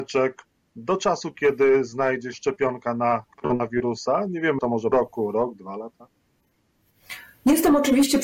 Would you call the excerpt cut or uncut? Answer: cut